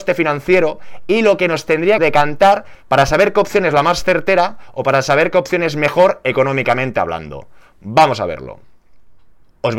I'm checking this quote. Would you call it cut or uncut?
cut